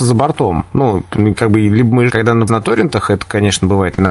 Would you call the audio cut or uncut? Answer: cut